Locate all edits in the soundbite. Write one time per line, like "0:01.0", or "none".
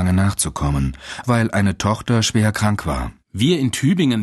0:01.2